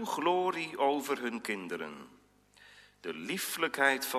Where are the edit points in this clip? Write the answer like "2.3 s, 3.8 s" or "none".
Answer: none